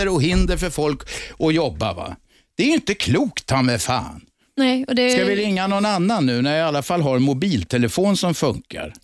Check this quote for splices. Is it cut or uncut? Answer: uncut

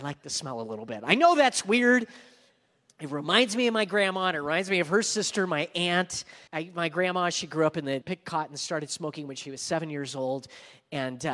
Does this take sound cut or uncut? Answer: cut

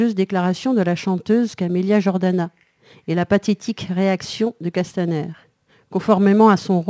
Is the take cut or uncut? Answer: uncut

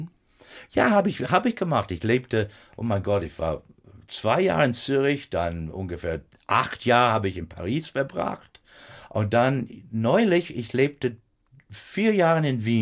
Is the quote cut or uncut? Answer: uncut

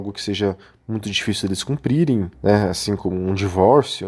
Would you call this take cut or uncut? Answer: cut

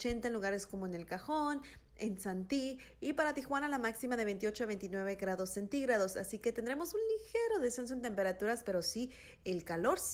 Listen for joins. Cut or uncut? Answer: uncut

